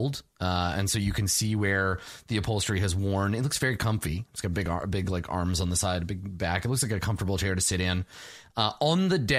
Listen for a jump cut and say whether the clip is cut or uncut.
uncut